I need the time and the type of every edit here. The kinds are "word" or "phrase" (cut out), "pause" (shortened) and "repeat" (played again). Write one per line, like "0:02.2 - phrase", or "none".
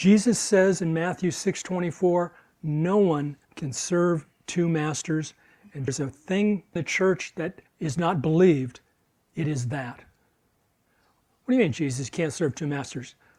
0:03.4 - pause
0:05.9 - phrase
0:06.8 - phrase
0:07.7 - pause

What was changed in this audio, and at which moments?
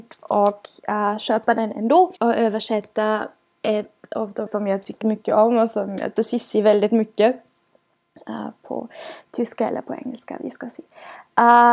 0:02.2 - pause
0:04.5 - word
0:05.0 - word
0:06.2 - phrase

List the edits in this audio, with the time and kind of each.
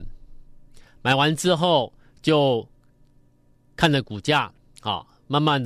none

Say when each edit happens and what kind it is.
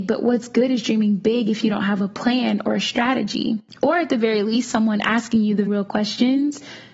0:05.7 - word

